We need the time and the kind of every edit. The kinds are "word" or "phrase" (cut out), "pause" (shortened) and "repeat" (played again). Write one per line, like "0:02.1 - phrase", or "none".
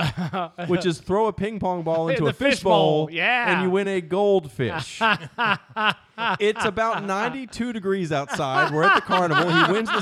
none